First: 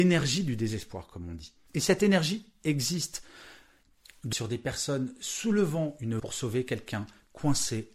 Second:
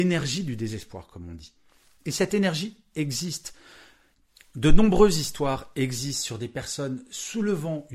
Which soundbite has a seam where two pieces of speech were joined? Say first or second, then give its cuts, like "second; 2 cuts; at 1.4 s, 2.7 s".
first; 3 cuts; at 1.7 s, 4.3 s, 6.2 s